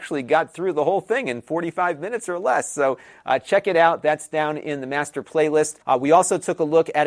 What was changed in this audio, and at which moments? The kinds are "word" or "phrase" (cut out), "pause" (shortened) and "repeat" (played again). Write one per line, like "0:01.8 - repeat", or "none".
0:05.8 - pause